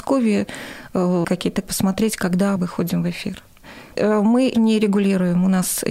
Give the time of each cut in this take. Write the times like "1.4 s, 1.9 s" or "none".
1.2 s, 1.6 s, 2.6 s, 4.0 s, 4.5 s